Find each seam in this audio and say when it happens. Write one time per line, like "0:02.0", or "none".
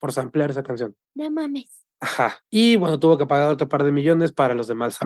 0:01.0
0:02.4